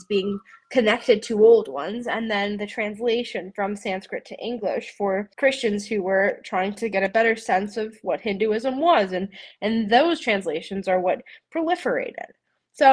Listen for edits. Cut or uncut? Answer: cut